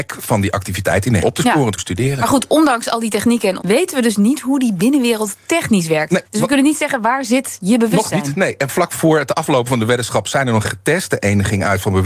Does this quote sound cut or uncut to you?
cut